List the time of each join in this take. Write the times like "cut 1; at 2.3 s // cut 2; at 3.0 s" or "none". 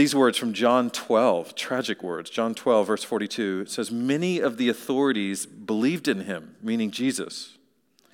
none